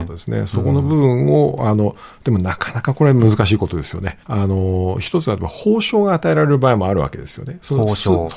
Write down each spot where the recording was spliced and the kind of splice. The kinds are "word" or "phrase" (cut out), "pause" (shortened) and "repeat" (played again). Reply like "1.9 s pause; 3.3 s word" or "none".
4.2 s pause